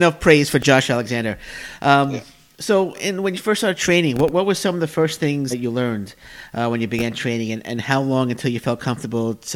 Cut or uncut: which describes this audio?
cut